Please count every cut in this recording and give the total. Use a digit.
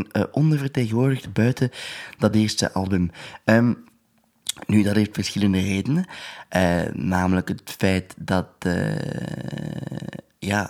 0